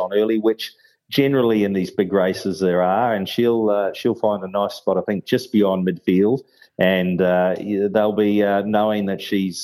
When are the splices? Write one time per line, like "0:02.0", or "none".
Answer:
none